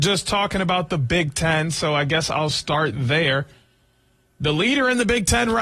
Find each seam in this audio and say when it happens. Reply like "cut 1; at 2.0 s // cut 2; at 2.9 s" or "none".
none